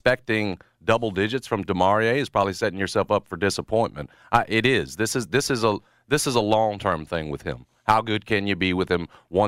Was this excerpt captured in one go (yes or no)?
yes